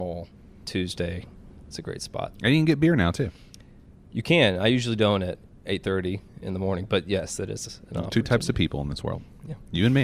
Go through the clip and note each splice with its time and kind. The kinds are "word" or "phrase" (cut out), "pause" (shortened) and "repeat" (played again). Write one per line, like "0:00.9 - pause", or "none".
none